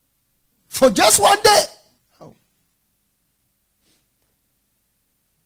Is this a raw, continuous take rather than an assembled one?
no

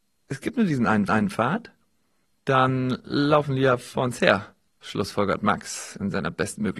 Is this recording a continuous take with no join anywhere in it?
no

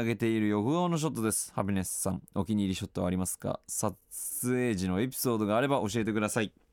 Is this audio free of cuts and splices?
no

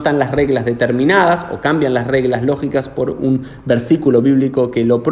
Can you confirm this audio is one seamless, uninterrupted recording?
yes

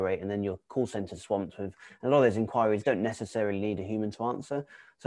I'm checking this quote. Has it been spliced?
no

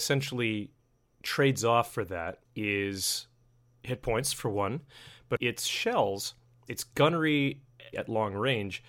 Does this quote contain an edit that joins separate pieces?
yes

